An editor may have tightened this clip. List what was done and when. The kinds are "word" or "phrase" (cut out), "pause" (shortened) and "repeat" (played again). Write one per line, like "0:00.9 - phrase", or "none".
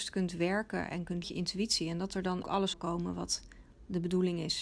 0:01.2 - phrase
0:02.4 - word
0:02.7 - phrase